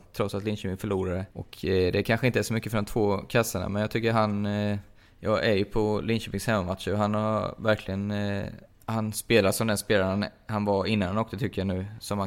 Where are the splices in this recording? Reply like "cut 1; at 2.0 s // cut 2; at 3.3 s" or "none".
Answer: cut 1; at 1.3 s // cut 2; at 5.1 s // cut 3; at 8.8 s